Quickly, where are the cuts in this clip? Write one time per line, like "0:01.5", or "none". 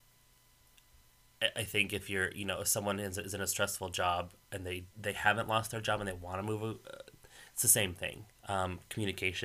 0:04.9
0:08.4